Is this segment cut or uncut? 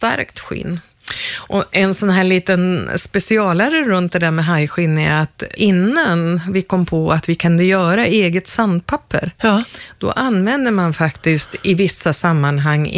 cut